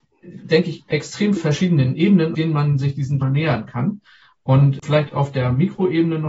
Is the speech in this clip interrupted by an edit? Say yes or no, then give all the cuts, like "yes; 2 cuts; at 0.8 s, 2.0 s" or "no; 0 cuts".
yes; 4 cuts; at 1.4 s, 2.3 s, 3.2 s, 4.8 s